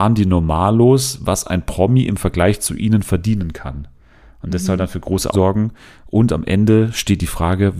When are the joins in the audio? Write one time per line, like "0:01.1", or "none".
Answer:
0:05.3